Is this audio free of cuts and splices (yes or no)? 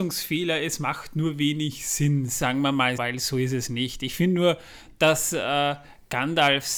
no